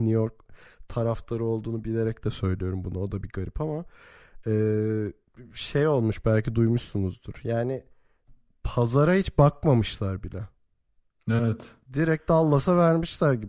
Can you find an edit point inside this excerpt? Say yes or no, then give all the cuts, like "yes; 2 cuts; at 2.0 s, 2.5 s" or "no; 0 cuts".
no; 0 cuts